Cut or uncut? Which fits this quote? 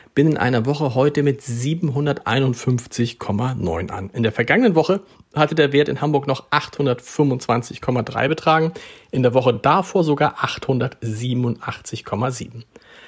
uncut